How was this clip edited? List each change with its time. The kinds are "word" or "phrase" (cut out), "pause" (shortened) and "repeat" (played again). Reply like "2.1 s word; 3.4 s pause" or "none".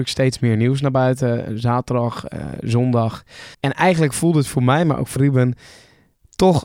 3.5 s pause; 5.2 s word